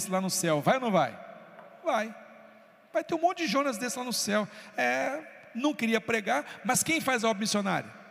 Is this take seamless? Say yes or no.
yes